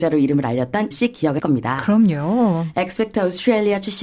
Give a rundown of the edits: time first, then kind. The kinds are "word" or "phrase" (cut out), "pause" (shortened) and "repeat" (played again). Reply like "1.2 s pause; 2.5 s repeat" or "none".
0.9 s word; 1.4 s word